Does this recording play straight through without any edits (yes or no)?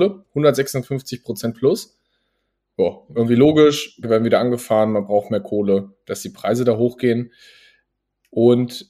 no